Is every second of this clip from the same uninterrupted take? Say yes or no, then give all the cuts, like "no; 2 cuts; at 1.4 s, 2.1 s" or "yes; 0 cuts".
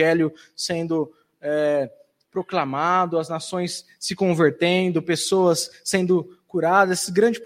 yes; 0 cuts